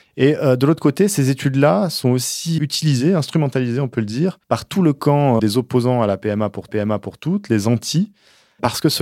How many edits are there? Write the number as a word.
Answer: four